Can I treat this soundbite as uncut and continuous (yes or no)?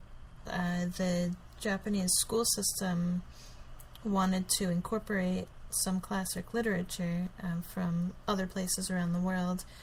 yes